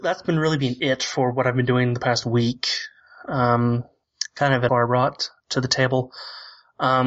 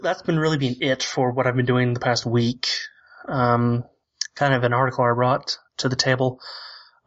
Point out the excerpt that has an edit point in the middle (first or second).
first